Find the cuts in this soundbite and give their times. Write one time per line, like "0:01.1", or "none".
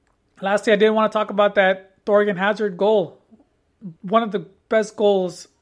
0:04.0